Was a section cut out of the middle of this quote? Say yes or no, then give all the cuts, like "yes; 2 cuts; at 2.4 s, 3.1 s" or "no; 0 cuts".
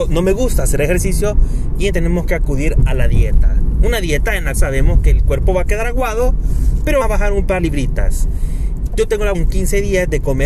yes; 5 cuts; at 1.9 s, 4.5 s, 7.0 s, 7.6 s, 9.3 s